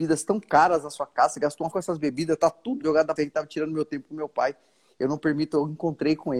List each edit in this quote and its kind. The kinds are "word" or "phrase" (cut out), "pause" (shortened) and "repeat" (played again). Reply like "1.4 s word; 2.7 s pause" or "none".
1.7 s word; 2.8 s word; 3.2 s phrase